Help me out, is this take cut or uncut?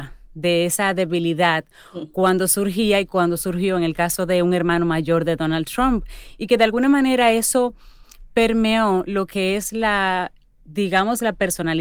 uncut